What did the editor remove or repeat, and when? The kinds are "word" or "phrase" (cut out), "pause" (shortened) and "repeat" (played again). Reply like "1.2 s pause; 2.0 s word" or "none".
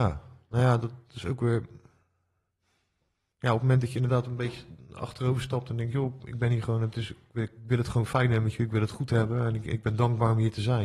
none